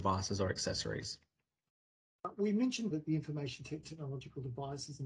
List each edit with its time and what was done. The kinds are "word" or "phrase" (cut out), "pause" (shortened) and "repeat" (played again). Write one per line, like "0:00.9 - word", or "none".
0:02.9 - word
0:03.8 - word